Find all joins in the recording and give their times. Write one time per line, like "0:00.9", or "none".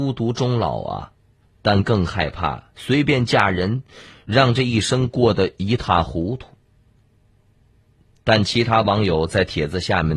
none

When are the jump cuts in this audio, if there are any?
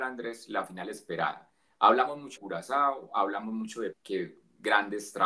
0:02.4
0:03.9

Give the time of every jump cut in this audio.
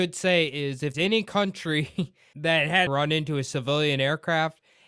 0:00.9
0:02.3
0:02.9

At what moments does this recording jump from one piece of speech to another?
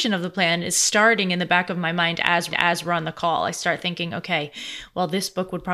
0:02.5

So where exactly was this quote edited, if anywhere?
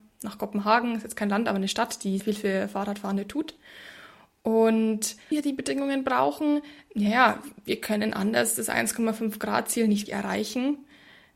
0:02.2
0:05.3
0:10.1

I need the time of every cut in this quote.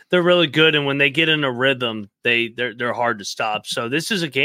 none

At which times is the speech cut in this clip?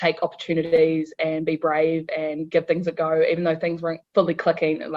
none

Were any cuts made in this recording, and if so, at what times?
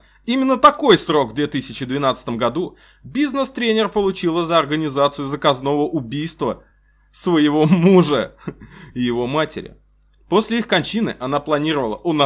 none

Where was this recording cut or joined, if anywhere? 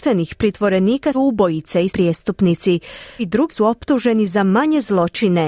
0:01.1
0:01.9
0:03.2
0:03.5

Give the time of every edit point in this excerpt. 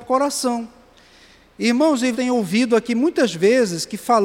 0:02.1

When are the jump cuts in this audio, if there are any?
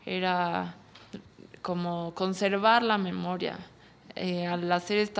none

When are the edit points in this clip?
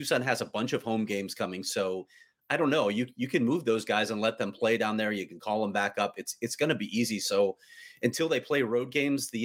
none

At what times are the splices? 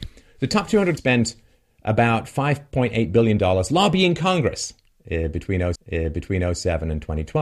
0:01.0
0:05.7

